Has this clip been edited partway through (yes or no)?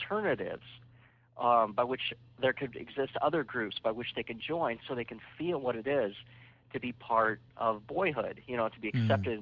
no